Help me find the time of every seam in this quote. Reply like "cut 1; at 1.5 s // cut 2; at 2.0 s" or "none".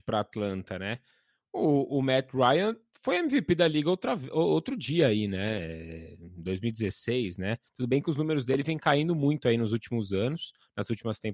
none